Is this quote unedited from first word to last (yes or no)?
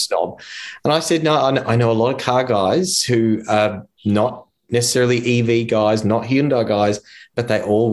yes